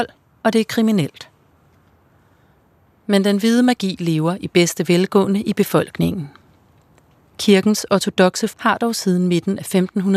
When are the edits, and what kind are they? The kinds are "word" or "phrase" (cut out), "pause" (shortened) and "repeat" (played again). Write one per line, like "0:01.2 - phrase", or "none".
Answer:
0:08.5 - word